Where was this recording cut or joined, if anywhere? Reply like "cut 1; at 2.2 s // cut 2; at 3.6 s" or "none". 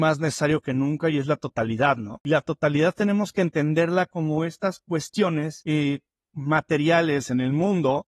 none

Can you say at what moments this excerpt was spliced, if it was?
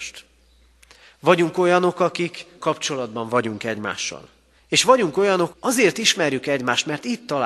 cut 1; at 2.6 s // cut 2; at 4.6 s // cut 3; at 5.5 s

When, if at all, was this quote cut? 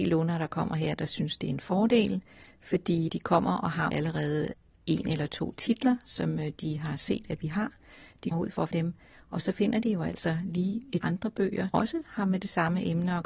cut 1; at 3.1 s // cut 2; at 3.9 s // cut 3; at 8.3 s // cut 4; at 8.7 s // cut 5; at 11.0 s // cut 6; at 11.7 s

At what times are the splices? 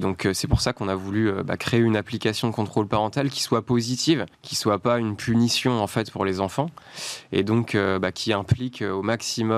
cut 1; at 4.3 s

